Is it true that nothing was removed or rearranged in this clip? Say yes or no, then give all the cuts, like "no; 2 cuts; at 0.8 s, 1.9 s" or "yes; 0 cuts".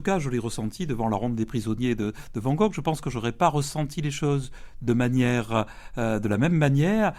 yes; 0 cuts